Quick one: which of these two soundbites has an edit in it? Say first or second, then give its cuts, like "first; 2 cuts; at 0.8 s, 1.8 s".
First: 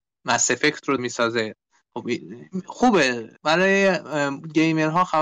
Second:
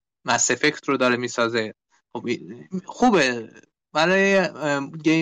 first; 2 cuts; at 1.0 s, 3.4 s